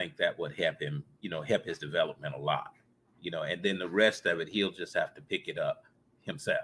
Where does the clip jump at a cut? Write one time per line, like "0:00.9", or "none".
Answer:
none